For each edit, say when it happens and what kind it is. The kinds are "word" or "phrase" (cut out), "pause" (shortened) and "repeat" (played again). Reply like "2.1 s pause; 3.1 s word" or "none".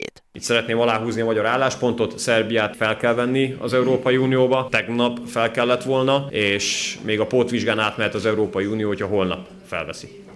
none